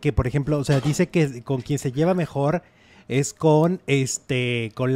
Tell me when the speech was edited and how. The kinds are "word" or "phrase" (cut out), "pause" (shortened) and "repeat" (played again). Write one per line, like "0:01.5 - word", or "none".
none